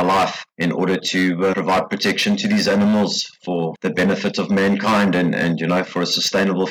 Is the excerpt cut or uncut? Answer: cut